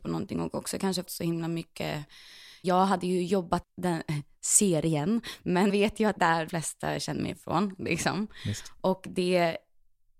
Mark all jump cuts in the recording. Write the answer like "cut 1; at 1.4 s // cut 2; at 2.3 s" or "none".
cut 1; at 1.0 s // cut 2; at 2.6 s // cut 3; at 3.6 s // cut 4; at 5.7 s // cut 5; at 6.2 s // cut 6; at 6.5 s // cut 7; at 7.2 s